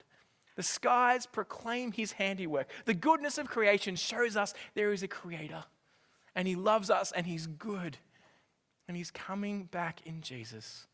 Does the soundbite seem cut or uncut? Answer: uncut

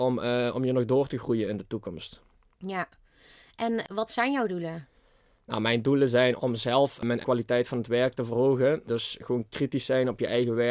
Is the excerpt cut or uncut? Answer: cut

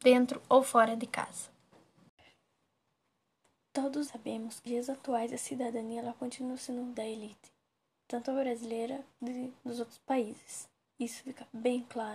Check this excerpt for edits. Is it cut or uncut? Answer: cut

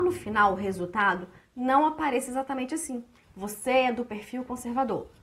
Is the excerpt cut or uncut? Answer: uncut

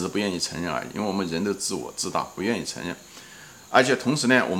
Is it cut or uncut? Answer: uncut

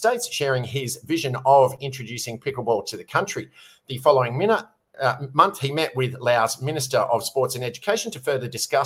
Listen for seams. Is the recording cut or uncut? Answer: uncut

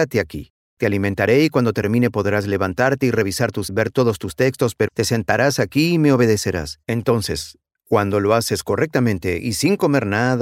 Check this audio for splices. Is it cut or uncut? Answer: cut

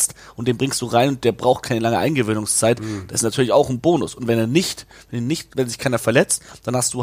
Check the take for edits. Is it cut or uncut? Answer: cut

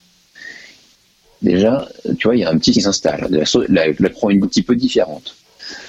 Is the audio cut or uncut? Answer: cut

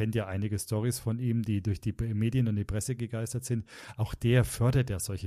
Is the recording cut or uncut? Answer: uncut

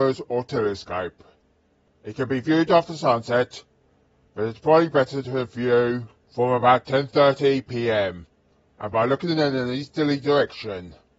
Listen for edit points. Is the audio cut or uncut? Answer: uncut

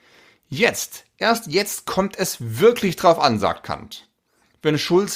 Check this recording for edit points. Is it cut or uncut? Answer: uncut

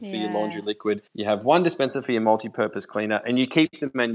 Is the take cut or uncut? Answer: cut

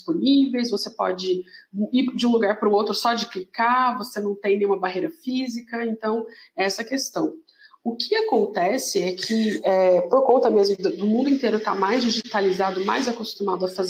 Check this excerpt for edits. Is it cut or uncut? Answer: uncut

